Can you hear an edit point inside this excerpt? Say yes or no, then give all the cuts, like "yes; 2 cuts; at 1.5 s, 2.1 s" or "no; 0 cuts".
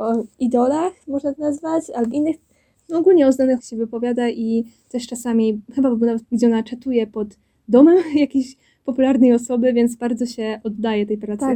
yes; 4 cuts; at 1.3 s, 2.1 s, 3.6 s, 6.2 s